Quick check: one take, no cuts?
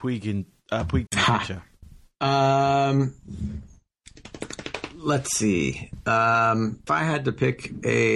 no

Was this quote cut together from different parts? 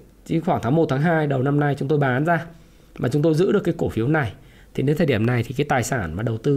no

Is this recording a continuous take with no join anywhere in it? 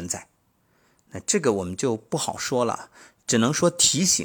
yes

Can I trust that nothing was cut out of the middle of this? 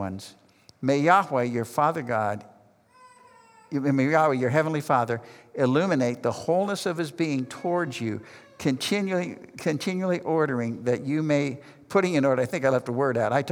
yes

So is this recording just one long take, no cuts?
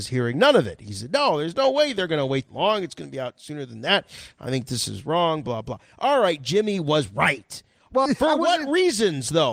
no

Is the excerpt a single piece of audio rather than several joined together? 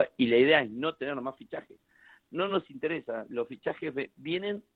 yes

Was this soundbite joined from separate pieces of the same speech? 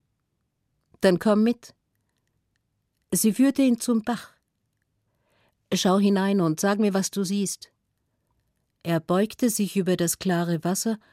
no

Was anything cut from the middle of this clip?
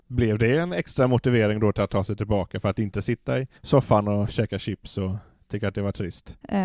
yes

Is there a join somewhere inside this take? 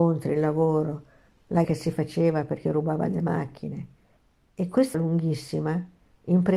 yes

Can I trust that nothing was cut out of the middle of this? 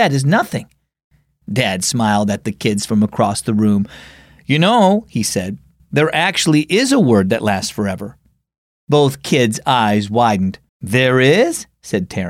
no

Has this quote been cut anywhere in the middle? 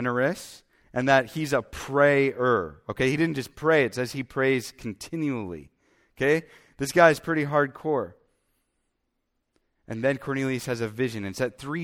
no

